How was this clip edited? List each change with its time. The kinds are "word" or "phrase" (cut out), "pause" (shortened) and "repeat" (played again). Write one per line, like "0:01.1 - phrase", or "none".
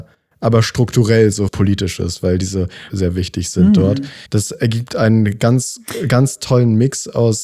0:01.5 - phrase
0:02.9 - phrase
0:04.3 - pause